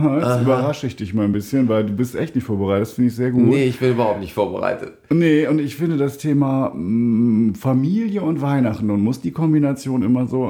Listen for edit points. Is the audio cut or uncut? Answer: uncut